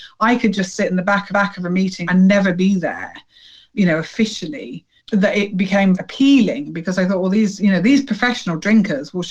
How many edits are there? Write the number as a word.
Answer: five